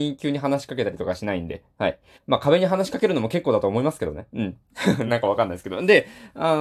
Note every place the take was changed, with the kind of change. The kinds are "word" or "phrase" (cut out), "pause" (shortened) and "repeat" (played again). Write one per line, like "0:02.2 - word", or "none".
0:02.1 - pause
0:05.1 - word